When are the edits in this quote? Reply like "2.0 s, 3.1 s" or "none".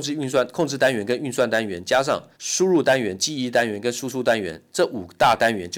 2.3 s